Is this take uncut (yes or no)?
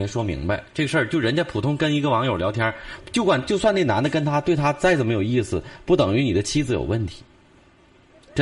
yes